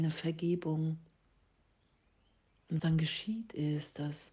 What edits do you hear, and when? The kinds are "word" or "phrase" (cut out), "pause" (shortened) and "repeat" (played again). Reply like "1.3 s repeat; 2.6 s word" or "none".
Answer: 2.8 s word